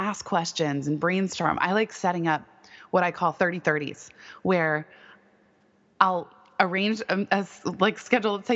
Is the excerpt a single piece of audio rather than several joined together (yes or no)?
yes